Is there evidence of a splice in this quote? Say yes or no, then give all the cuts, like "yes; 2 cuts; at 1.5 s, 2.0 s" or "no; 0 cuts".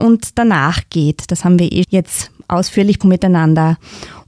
yes; 2 cuts; at 1.8 s, 3.0 s